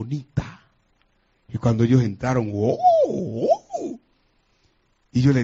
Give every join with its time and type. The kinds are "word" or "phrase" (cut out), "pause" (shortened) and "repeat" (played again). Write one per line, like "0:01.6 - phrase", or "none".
none